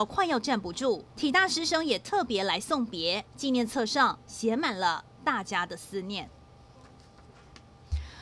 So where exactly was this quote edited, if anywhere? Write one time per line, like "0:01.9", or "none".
0:01.1
0:03.3